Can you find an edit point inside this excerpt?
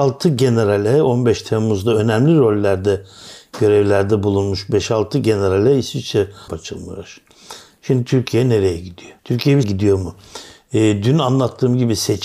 yes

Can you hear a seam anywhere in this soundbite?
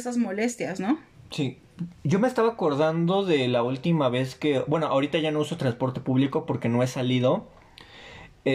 no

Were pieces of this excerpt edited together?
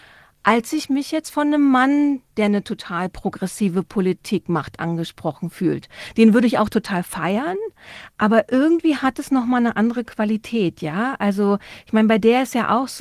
no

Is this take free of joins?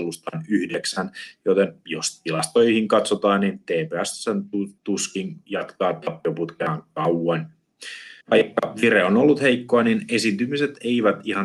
no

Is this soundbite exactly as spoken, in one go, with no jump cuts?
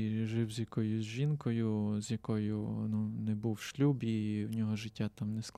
yes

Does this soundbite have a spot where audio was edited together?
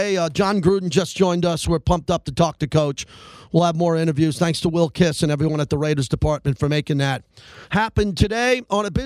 no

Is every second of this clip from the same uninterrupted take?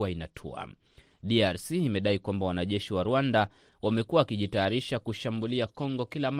yes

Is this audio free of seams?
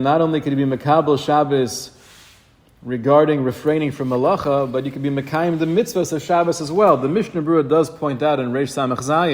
yes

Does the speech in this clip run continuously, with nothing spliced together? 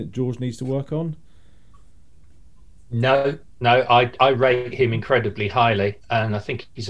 yes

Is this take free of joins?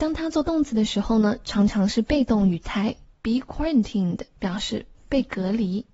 yes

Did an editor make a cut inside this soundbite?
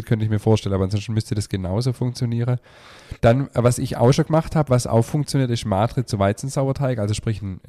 yes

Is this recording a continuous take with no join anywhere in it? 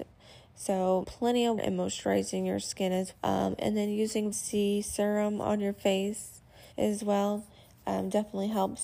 no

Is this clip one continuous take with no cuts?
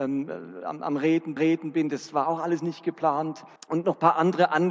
no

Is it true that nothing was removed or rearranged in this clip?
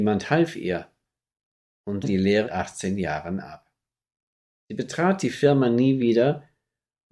no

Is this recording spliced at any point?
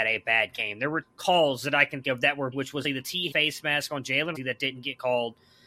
yes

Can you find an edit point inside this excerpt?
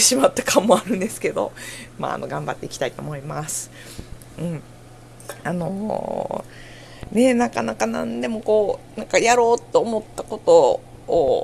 yes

